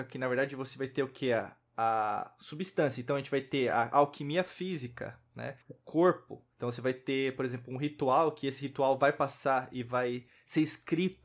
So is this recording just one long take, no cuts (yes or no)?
no